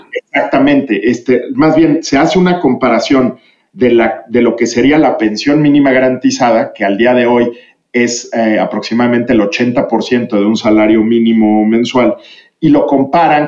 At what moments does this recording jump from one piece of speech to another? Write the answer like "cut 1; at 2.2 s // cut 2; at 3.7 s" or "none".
none